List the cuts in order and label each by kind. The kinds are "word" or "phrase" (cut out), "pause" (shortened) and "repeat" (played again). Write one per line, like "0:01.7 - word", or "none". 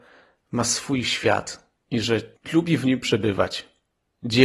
0:01.8 - pause